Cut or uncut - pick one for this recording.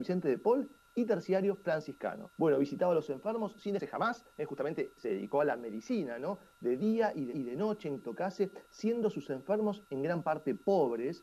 cut